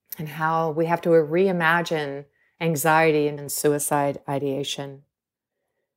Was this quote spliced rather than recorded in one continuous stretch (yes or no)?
yes